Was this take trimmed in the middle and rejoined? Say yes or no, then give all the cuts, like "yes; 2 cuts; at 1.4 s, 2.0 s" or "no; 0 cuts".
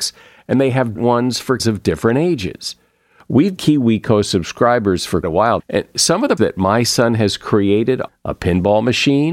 yes; 7 cuts; at 1.0 s, 1.6 s, 3.6 s, 5.2 s, 5.6 s, 6.4 s, 8.1 s